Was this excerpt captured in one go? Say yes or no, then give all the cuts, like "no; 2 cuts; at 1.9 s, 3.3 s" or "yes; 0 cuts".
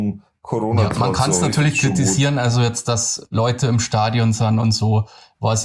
yes; 0 cuts